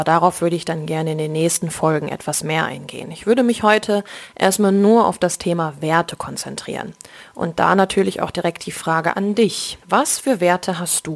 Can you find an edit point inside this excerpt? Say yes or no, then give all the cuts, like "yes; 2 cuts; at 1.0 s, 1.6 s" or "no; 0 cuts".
yes; 1 cut; at 9.8 s